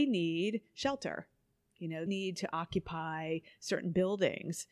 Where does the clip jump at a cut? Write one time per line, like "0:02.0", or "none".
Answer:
0:02.1

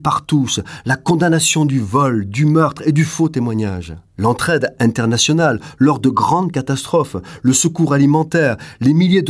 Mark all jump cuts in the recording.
0:04.1

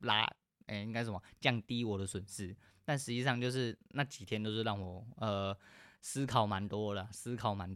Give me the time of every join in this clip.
none

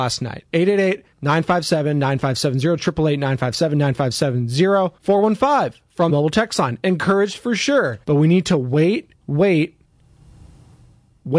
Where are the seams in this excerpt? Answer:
0:01.1
0:05.0
0:06.1
0:08.0
0:09.2

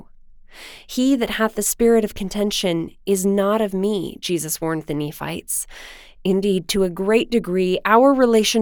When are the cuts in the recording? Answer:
none

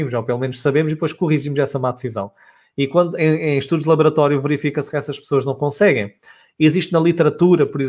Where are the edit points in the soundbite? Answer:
none

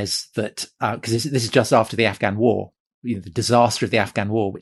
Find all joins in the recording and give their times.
none

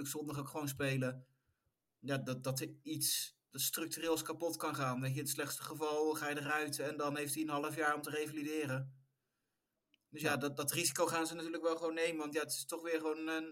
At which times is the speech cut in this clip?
none

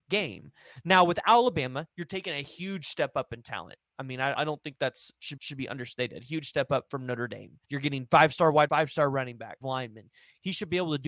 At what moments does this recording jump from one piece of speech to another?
0:04.3
0:05.4
0:07.6
0:08.7
0:09.6

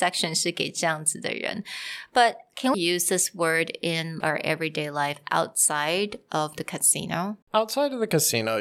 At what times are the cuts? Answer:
0:02.7
0:04.2
0:07.4

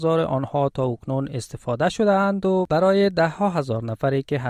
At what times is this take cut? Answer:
none

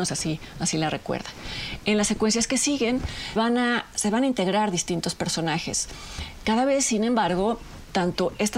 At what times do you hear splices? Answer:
0:03.4

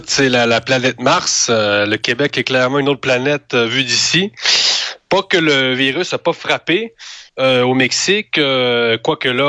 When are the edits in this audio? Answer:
0:07.3

